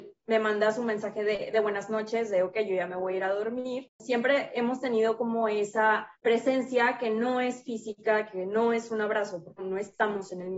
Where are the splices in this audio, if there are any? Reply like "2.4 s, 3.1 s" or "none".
6.2 s, 9.6 s